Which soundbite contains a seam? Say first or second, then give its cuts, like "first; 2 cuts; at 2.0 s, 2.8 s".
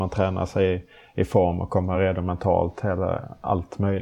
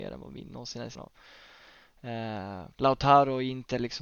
second; 2 cuts; at 0.9 s, 2.7 s